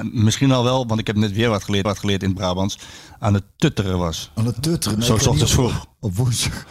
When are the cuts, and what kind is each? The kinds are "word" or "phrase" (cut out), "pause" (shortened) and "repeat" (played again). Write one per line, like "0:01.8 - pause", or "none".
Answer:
0:01.8 - repeat